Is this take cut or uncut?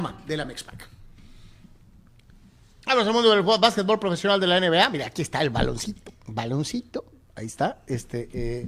uncut